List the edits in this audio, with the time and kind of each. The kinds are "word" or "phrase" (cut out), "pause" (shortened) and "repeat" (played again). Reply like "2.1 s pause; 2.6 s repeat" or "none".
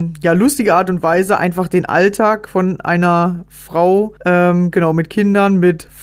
4.2 s pause